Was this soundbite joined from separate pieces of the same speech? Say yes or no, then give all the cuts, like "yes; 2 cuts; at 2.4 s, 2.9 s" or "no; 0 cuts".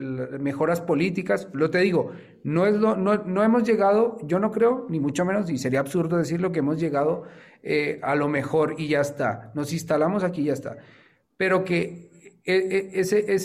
no; 0 cuts